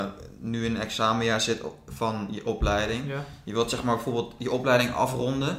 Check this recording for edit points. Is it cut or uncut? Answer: uncut